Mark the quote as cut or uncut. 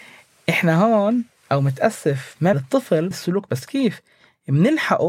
cut